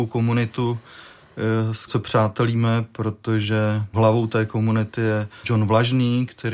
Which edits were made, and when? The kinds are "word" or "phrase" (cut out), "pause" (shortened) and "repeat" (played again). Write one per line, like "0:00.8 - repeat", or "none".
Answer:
0:01.9 - word
0:03.9 - word
0:05.4 - word